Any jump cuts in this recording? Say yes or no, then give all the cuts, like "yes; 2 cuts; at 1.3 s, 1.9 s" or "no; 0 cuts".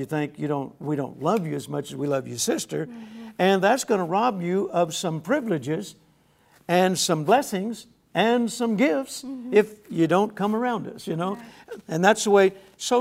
no; 0 cuts